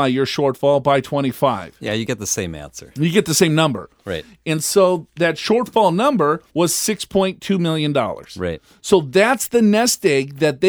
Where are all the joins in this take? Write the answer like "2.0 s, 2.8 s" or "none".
6.5 s